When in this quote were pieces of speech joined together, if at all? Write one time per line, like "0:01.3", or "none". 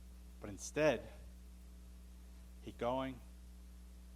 0:02.7

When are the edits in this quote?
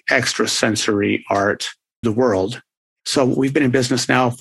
0:02.0

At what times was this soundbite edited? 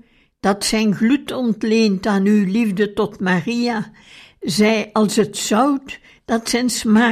none

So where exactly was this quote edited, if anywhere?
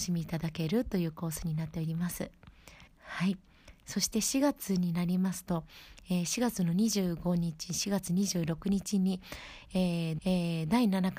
0:02.9
0:10.2

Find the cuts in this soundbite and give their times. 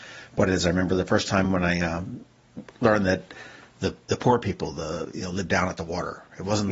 none

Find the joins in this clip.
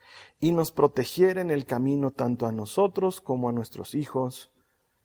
none

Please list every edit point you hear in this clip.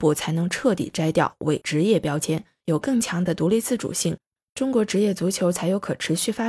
none

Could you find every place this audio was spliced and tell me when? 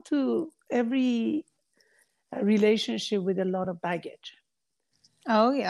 none

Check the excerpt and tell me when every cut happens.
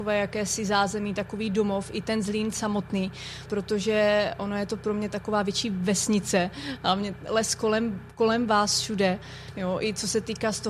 0:03.5
0:05.1
0:07.3

